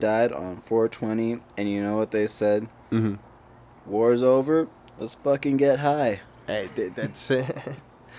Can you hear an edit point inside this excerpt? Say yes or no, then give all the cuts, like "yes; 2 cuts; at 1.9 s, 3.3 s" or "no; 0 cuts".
no; 0 cuts